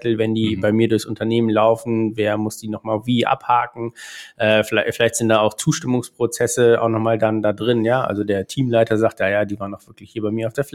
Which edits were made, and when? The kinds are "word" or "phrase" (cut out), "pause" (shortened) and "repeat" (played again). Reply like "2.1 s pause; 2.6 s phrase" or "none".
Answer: none

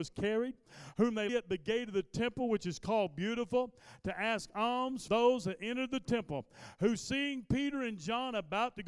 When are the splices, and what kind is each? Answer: 1.3 s phrase; 5.1 s word

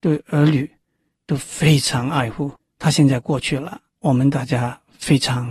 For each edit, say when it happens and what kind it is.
2.6 s pause; 3.9 s pause

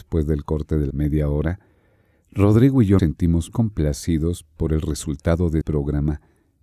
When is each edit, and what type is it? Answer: 0.9 s word; 3.0 s word; 3.5 s word; 5.6 s word

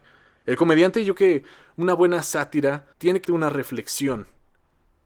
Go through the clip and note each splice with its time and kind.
1.1 s word; 2.9 s pause; 3.2 s word

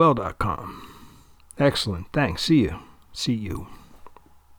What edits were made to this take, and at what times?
none

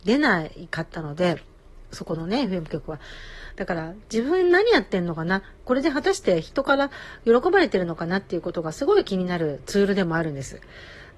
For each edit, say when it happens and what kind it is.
none

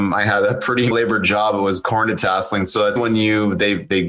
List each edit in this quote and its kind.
0.9 s word; 3.0 s word

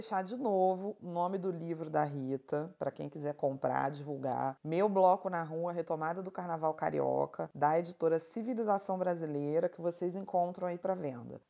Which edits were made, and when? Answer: none

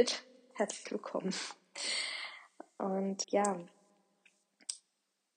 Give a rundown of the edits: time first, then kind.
3.2 s word

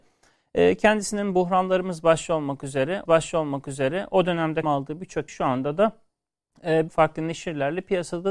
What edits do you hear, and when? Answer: 3.1 s repeat; 4.6 s word; 5.3 s word; 6.9 s word

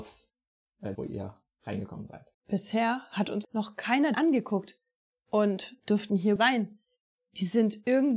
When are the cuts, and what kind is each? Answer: 0.9 s word; 2.3 s pause; 3.4 s word; 4.1 s phrase; 5.8 s word; 6.4 s phrase

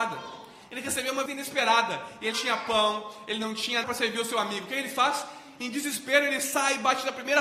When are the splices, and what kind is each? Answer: 1.3 s word; 2.3 s word; 3.8 s word

